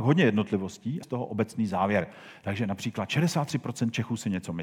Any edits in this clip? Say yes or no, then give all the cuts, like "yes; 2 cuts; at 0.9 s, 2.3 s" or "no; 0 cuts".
yes; 1 cut; at 1.0 s